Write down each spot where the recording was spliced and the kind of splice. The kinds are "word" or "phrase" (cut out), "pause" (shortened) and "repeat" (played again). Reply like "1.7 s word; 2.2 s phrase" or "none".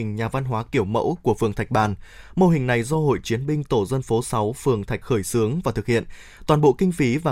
3.2 s word; 4.2 s word; 5.0 s word